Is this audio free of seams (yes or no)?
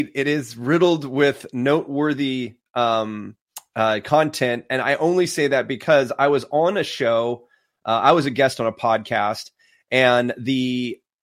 yes